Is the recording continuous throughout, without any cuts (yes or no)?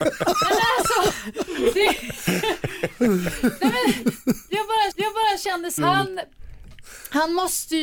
no